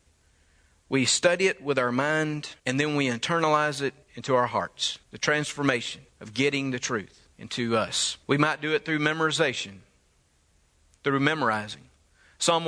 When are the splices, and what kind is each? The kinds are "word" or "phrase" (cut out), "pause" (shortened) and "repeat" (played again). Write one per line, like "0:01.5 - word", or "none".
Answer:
0:02.6 - pause
0:04.0 - pause
0:05.0 - pause
0:06.1 - pause
0:07.3 - pause
0:08.2 - pause